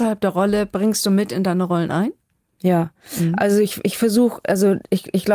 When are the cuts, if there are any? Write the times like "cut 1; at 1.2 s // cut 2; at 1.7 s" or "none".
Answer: none